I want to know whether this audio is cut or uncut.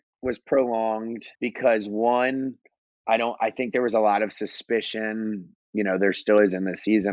cut